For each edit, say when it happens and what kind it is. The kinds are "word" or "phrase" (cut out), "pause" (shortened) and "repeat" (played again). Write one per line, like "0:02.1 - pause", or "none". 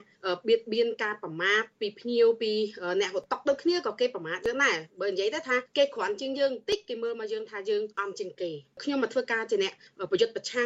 0:04.9 - pause

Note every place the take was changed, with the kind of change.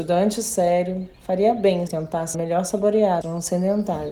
0:01.1 - pause
0:01.9 - word
0:02.3 - phrase
0:03.2 - phrase

